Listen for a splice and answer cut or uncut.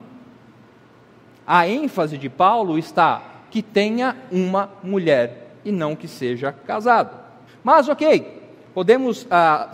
cut